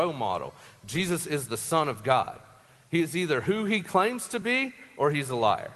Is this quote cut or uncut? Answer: uncut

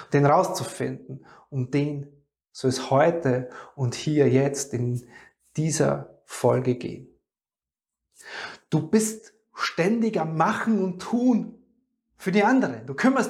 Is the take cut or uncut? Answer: uncut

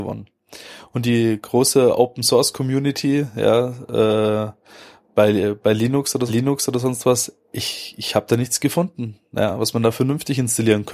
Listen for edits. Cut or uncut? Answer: cut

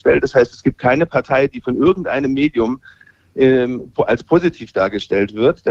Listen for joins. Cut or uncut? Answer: uncut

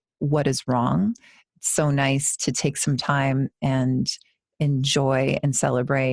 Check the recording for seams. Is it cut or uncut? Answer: uncut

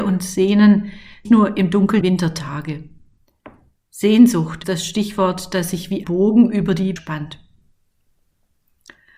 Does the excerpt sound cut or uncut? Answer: cut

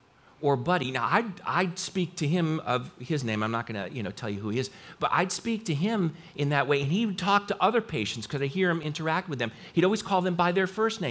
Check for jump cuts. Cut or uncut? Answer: uncut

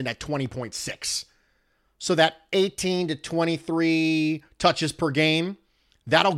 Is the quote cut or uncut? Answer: uncut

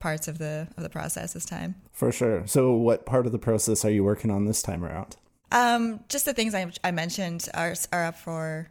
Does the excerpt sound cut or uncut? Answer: uncut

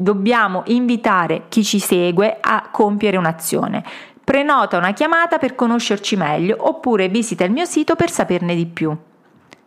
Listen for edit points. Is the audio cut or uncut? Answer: uncut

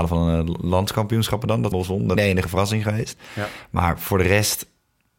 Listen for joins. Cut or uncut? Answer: cut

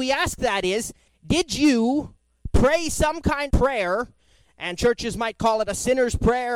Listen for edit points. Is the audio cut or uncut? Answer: cut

